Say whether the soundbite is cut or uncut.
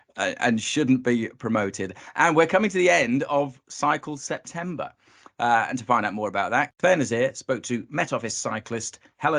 uncut